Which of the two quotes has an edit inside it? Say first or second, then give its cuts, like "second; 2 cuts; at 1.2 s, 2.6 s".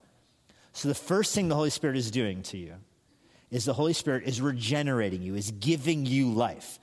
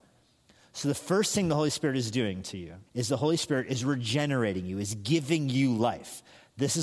second; 1 cut; at 2.9 s